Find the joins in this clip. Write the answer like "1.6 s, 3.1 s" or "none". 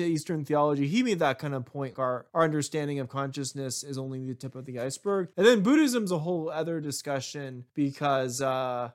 1.9 s, 2.3 s, 5.3 s, 7.7 s

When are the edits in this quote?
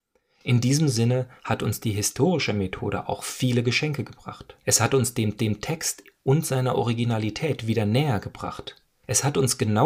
4.6 s, 5.4 s

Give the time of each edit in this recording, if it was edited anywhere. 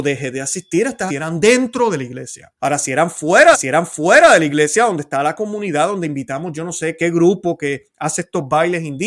1.1 s, 2.6 s, 3.5 s, 7.0 s

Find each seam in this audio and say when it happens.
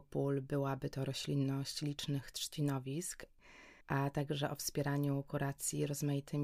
3.8 s

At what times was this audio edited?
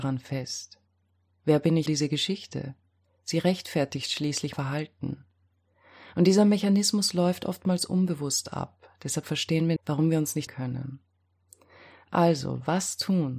1.9 s, 4.5 s, 9.8 s, 10.5 s

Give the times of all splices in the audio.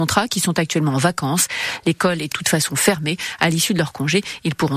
2.3 s

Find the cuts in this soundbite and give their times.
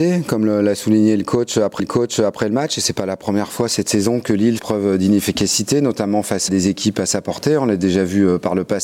1.8 s, 4.6 s, 6.5 s

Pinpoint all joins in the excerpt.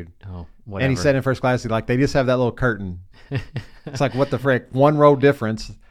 none

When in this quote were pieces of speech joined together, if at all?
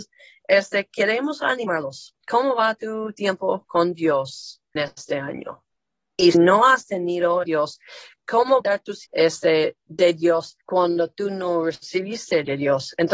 4.8 s, 6.3 s, 7.4 s, 8.6 s, 9.0 s, 10.6 s

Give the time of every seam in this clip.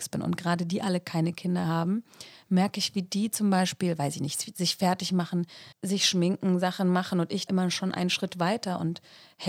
5.7 s, 7.5 s

